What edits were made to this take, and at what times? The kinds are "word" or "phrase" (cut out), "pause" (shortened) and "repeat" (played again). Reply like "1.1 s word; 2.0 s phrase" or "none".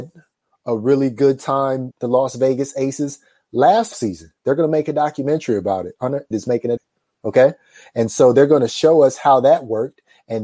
1.9 s phrase; 3.9 s word; 6.3 s word; 6.8 s phrase